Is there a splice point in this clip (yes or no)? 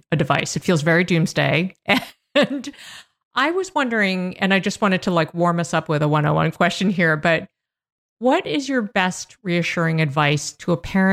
no